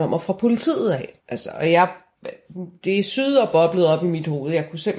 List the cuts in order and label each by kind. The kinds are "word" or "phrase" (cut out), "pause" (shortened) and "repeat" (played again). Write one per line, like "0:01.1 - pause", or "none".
0:01.2 - pause